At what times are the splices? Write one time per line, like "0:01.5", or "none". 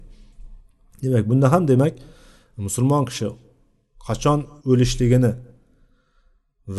0:04.6